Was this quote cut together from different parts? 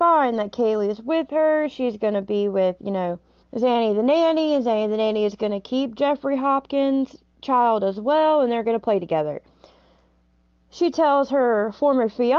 yes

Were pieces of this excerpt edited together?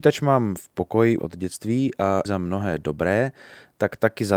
yes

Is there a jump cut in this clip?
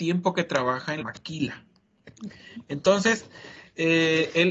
yes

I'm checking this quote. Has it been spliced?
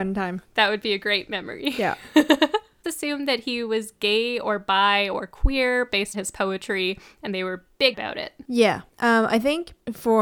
yes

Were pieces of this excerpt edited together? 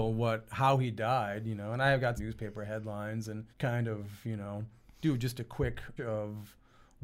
yes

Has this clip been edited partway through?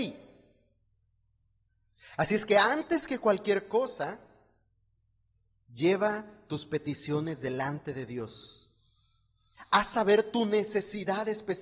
no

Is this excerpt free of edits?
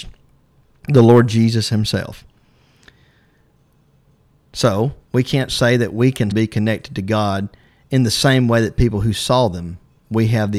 no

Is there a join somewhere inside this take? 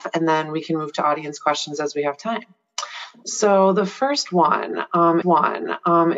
yes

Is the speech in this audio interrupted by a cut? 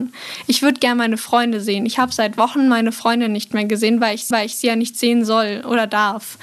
yes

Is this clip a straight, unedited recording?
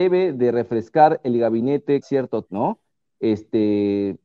no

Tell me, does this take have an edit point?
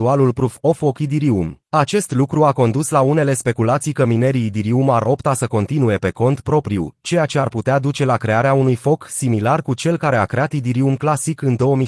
yes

